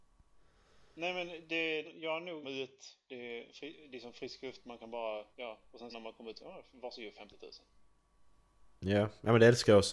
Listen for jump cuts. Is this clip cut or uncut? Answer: cut